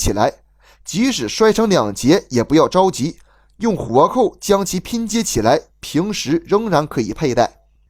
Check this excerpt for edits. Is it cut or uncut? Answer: uncut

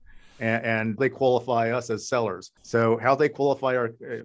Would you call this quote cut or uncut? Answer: cut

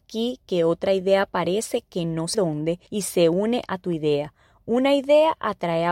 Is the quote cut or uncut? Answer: cut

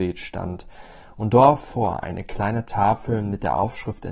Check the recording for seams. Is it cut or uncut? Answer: uncut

